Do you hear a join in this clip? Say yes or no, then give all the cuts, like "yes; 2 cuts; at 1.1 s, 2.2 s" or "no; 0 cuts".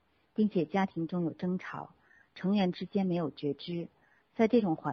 no; 0 cuts